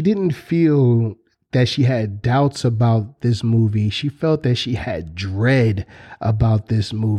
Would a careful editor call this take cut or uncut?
uncut